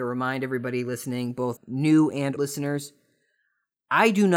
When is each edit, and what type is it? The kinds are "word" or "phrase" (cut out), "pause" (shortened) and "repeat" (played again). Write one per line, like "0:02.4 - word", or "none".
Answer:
0:01.6 - word
0:02.4 - word

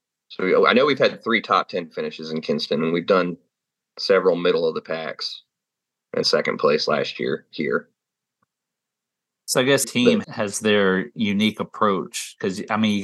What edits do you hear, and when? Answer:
0:06.2 - phrase
0:09.8 - word
0:10.2 - word

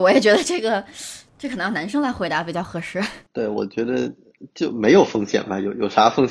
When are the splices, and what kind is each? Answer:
0:01.3 - pause

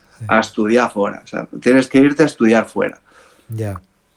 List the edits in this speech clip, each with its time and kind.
none

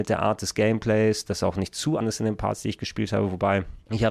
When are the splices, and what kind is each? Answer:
0:02.0 - phrase

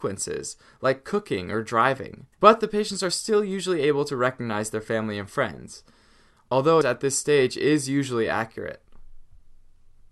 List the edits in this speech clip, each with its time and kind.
0:02.3 - pause
0:06.8 - phrase

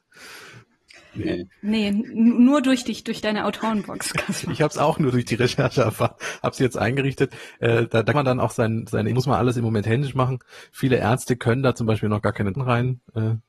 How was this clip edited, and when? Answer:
0:08.1 - word
0:09.1 - phrase
0:12.5 - word

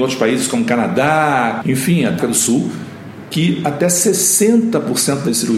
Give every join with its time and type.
0:01.6 - word
0:02.2 - word

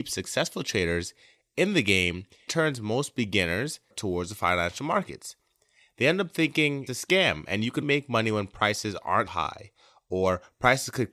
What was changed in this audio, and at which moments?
0:02.5 - word
0:03.9 - word
0:06.9 - word
0:07.8 - word
0:09.3 - word

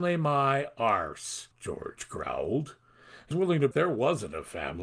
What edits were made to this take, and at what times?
0:01.5 - pause
0:03.3 - word
0:03.7 - word

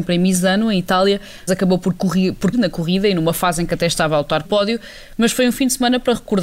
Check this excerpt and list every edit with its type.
0:01.5 - word
0:02.5 - word
0:04.4 - word

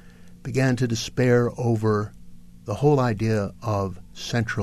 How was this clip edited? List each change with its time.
none

